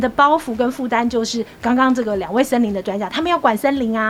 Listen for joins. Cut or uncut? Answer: uncut